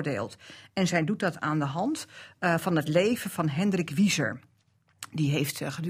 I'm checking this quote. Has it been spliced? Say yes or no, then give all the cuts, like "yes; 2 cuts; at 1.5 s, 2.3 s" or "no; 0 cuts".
no; 0 cuts